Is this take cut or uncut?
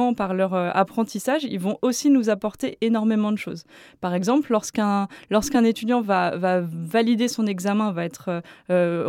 uncut